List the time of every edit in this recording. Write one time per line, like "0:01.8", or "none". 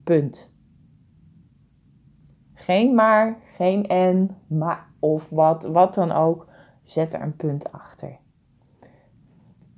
none

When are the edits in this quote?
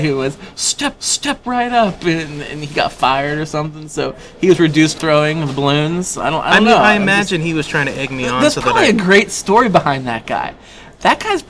0:01.0
0:05.0

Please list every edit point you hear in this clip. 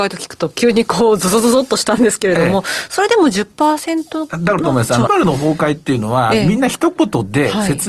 0:05.1

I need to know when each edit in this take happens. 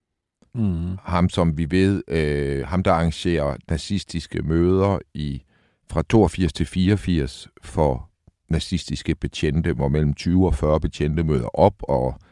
none

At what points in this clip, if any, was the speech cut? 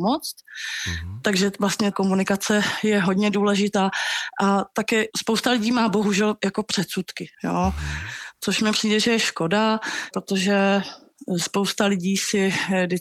0:07.3

